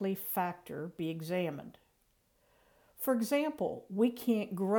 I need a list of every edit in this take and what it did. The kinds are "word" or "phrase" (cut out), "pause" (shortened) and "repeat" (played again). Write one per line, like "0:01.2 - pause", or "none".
none